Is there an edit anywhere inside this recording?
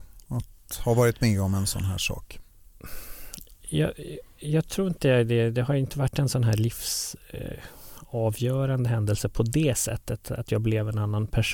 no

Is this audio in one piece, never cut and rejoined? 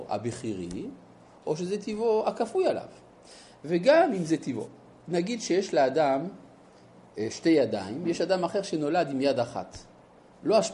yes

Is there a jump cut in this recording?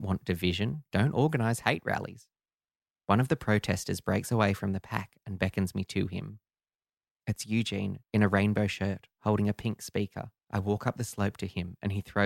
yes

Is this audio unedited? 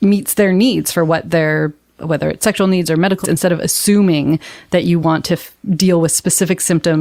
no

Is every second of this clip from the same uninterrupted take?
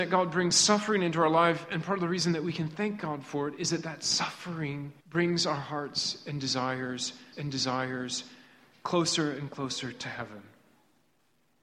no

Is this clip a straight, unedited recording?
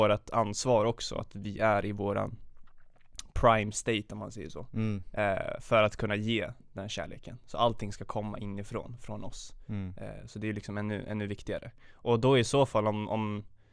yes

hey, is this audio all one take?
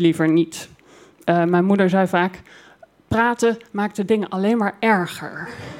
yes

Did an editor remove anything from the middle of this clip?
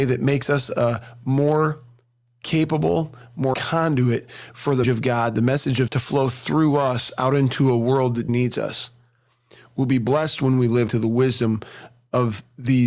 yes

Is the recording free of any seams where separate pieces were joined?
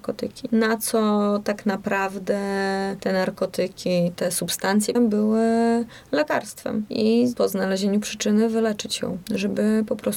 no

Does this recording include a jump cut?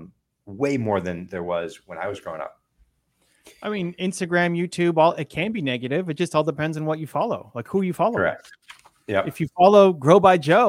no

